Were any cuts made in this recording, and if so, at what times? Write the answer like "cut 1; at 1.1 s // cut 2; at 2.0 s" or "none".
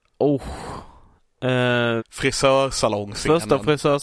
cut 1; at 2.0 s